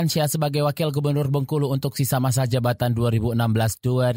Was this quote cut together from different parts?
no; 0 cuts

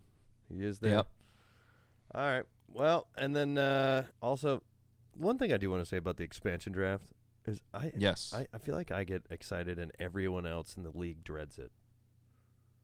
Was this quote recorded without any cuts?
no; 1 cut; at 4.1 s

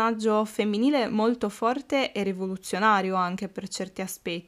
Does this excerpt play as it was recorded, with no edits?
yes; 0 cuts

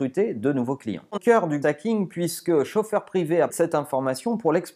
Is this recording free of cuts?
no; 3 cuts; at 1.2 s, 1.6 s, 3.5 s

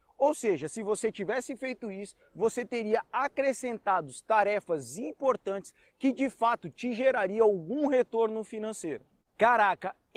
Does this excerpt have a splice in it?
no; 0 cuts

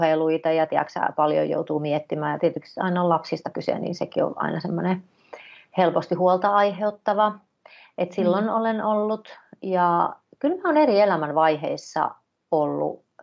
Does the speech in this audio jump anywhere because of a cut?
no; 0 cuts

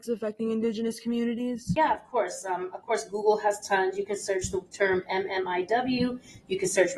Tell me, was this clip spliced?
no; 0 cuts

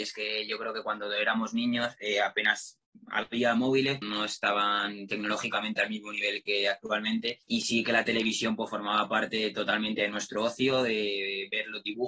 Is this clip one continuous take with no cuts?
no; 2 cuts; at 4.0 s, 7.4 s

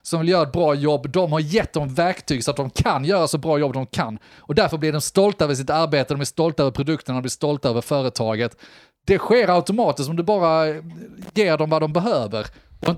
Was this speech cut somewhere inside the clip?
no; 0 cuts

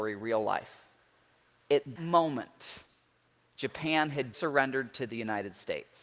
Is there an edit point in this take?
yes; 2 cuts; at 2.0 s, 4.3 s

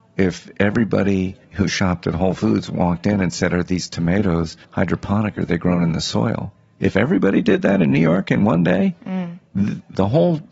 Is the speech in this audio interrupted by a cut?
yes; 3 cuts; at 1.4 s, 4.6 s, 6.6 s

